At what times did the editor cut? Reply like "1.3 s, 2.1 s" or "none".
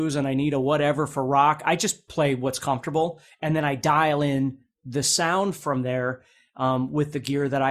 none